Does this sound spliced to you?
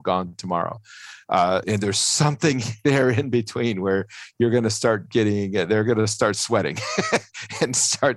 yes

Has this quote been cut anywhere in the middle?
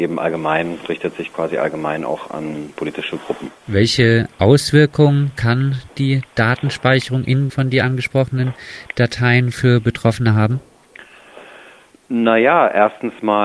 yes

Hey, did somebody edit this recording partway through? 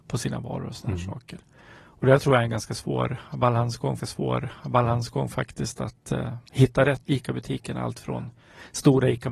yes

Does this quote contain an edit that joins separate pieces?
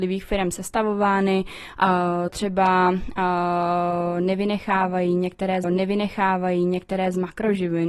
yes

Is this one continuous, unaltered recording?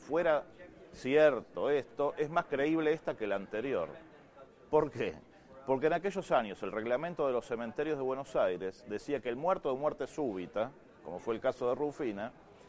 yes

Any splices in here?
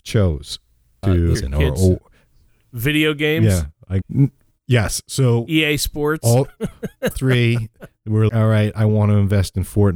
yes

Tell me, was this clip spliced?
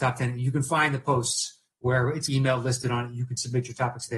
yes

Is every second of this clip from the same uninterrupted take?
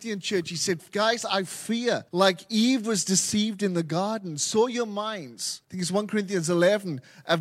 no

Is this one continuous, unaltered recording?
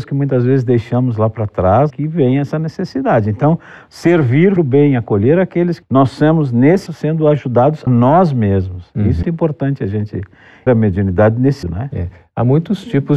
no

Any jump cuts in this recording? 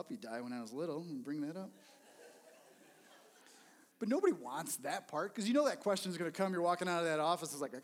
no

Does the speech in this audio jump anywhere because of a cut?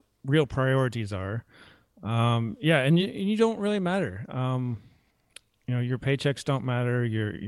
no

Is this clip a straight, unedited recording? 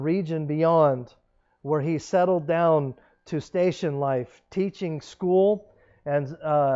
yes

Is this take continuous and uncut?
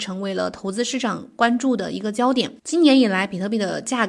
no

